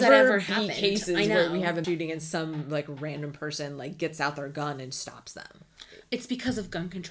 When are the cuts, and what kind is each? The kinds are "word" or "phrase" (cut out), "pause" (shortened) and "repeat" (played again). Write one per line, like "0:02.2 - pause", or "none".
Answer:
0:01.8 - word